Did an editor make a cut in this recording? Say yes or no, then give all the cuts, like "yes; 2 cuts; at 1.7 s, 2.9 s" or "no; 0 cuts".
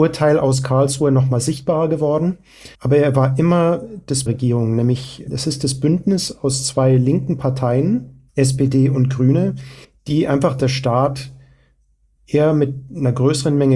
yes; 5 cuts; at 2.7 s, 4.3 s, 8.3 s, 9.8 s, 10.6 s